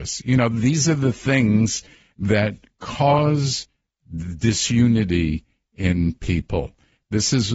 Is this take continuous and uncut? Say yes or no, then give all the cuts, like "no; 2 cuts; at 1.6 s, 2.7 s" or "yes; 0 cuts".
yes; 0 cuts